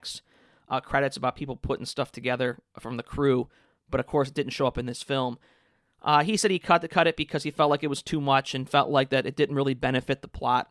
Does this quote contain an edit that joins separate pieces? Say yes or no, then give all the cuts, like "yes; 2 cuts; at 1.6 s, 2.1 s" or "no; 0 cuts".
no; 0 cuts